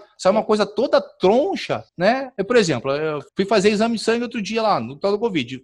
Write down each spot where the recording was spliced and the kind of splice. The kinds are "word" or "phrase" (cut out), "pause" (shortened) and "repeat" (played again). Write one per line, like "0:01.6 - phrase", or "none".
0:01.9 - pause
0:03.3 - pause